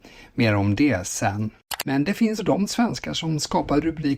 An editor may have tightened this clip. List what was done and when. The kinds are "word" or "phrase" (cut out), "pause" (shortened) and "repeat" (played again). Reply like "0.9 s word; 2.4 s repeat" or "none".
2.4 s word

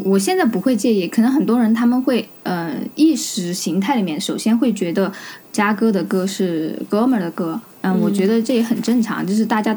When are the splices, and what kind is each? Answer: 2.4 s pause; 7.7 s pause

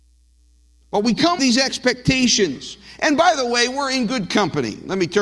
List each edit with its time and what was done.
1.4 s word

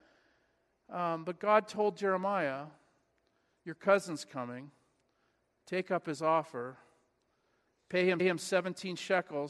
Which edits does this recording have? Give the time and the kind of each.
8.2 s repeat

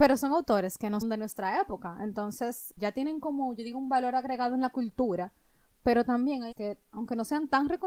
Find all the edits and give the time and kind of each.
1.0 s word; 2.8 s word; 6.5 s word

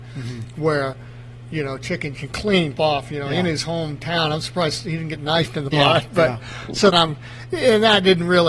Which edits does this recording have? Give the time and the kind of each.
2.1 s word; 2.8 s word; 5.7 s word; 6.9 s word

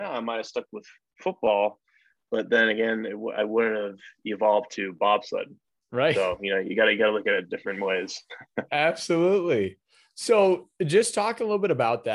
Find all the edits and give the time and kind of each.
none

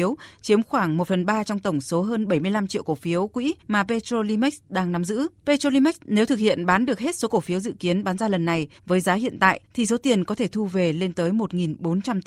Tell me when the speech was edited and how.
3.6 s pause; 5.4 s pause; 8.8 s pause; 9.6 s pause

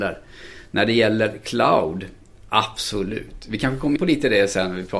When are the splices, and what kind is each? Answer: 4.0 s word

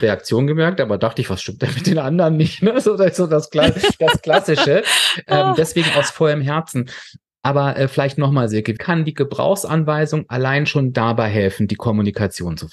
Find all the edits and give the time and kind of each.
8.8 s word

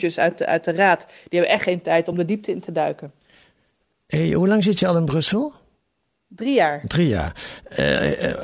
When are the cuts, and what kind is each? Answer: none

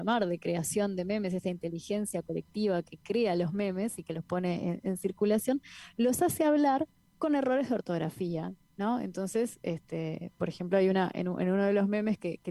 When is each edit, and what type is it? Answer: none

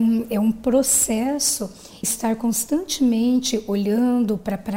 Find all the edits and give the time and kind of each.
2.0 s word

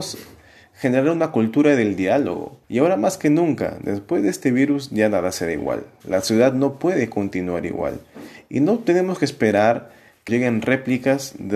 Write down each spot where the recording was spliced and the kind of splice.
2.6 s pause; 10.3 s word

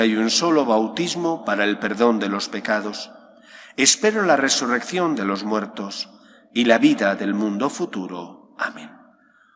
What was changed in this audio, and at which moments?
none

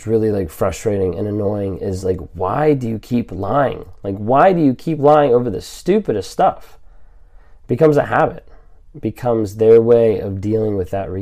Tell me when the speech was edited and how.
none

